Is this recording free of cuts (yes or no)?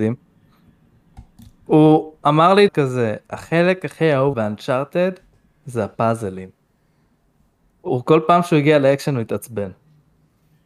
no